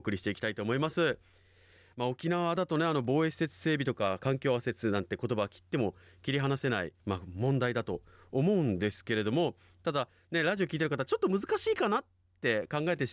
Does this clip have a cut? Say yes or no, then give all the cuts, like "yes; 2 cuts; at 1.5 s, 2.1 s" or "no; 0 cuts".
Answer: yes; 1 cut; at 7.0 s